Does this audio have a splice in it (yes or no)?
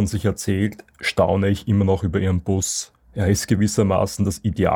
no